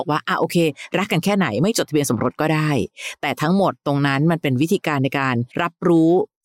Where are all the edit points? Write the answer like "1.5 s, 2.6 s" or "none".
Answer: 5.5 s